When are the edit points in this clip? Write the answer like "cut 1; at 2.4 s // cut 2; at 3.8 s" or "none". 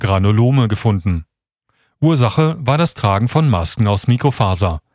none

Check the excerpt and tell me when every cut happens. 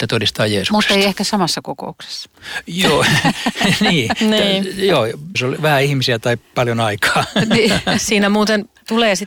cut 1; at 5.3 s

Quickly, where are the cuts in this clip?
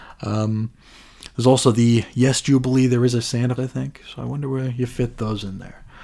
cut 1; at 3.6 s

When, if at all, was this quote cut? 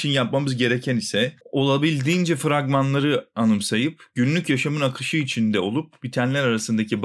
cut 1; at 1.4 s

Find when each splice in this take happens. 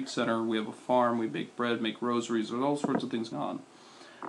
cut 1; at 3.3 s

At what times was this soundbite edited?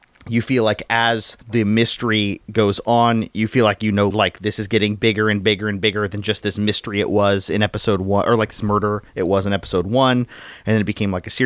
cut 1; at 1.4 s // cut 2; at 4.1 s

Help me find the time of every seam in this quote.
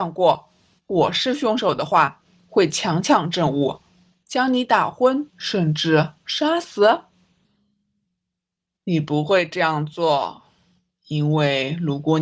cut 1; at 5.3 s

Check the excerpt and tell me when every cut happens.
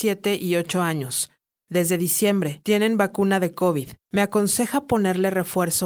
none

